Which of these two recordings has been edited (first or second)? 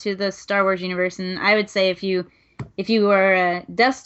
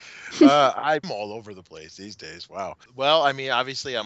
second